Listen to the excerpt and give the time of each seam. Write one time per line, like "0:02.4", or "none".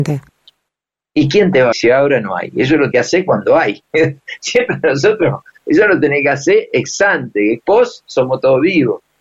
0:01.7
0:02.9